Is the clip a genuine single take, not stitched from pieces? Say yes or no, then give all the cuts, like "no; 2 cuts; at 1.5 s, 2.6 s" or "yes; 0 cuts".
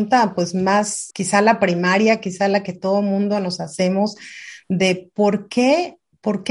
no; 1 cut; at 1.1 s